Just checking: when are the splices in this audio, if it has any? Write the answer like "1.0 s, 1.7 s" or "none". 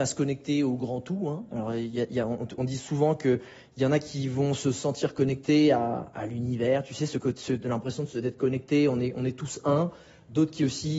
none

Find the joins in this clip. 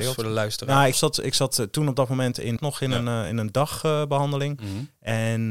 0.9 s, 2.6 s

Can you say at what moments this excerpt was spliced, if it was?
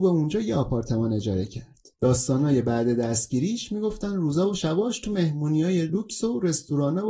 1.9 s

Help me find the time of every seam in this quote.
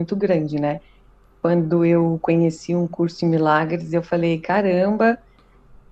none

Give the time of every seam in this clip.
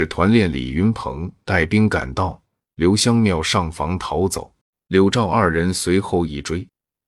4.6 s

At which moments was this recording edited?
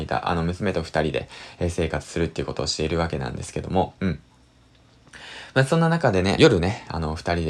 6.4 s

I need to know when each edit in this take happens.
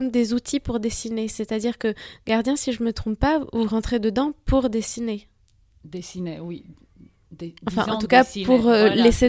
none

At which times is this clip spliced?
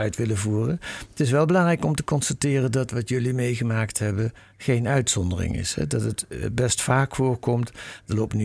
none

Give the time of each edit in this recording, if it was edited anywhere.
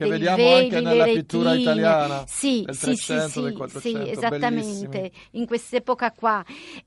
none

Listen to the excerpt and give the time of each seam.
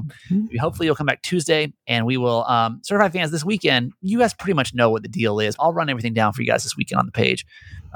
5.6 s

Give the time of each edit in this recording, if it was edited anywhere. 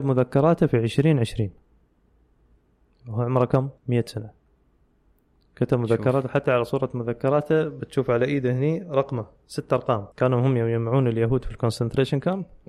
3.8 s, 4.8 s, 10.1 s

